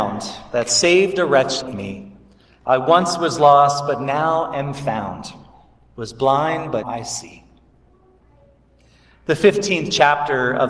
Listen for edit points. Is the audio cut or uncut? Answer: cut